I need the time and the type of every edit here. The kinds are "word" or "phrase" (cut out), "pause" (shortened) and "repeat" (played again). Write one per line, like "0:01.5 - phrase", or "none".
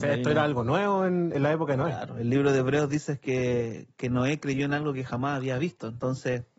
none